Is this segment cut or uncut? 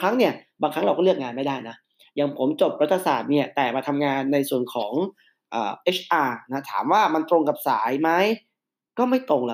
uncut